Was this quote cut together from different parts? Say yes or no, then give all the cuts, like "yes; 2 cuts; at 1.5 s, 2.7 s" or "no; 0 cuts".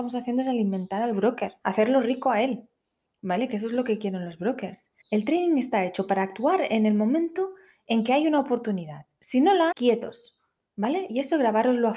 yes; 3 cuts; at 1.6 s, 5.0 s, 9.7 s